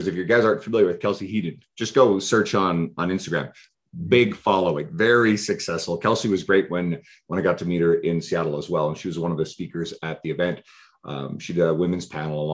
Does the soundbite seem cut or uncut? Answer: uncut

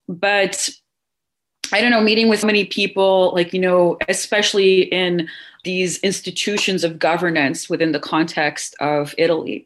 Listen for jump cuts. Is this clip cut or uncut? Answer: cut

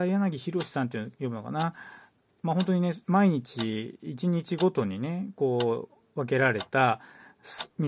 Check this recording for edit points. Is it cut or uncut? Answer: uncut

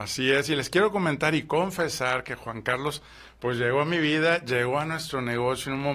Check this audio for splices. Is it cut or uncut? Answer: uncut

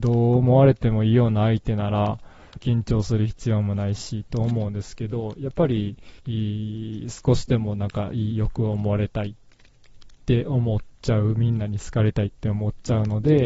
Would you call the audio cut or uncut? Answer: cut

